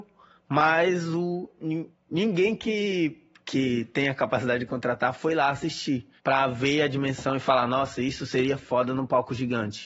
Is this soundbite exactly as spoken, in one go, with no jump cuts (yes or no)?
no